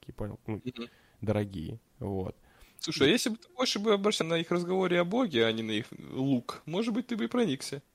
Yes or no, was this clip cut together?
yes